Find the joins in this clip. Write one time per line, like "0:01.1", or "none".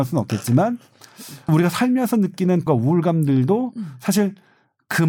0:01.5
0:02.7